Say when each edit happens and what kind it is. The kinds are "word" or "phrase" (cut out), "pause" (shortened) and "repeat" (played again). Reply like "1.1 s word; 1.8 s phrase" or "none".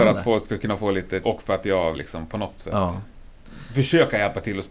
1.2 s word; 1.9 s word